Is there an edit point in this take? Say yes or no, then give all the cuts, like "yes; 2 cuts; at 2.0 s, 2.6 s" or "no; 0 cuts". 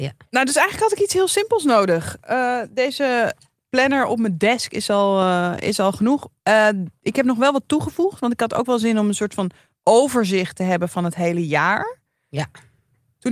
no; 0 cuts